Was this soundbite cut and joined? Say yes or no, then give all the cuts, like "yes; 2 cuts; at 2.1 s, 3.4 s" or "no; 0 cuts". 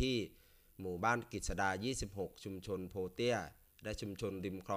no; 0 cuts